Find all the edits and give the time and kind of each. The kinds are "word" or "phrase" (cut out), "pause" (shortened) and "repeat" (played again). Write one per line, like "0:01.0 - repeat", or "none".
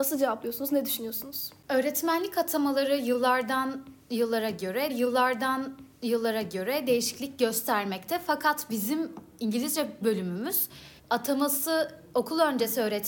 0:04.9 - repeat
0:10.0 - word
0:11.0 - pause